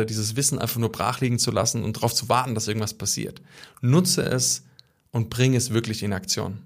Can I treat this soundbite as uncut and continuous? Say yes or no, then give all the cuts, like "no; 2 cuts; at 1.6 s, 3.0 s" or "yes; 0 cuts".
yes; 0 cuts